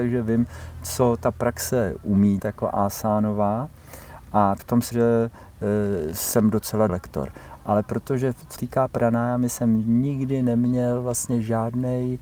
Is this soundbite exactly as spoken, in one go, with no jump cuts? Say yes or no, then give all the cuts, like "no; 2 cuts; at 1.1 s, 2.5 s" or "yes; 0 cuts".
no; 5 cuts; at 2.4 s, 4.6 s, 4.9 s, 6.9 s, 8.6 s